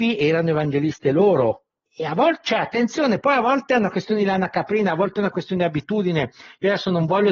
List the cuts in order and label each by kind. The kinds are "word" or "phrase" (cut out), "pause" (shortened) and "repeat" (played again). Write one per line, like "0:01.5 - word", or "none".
0:01.9 - pause